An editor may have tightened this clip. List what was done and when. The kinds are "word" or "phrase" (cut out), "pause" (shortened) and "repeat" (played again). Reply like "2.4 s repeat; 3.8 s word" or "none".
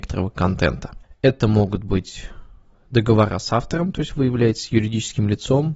none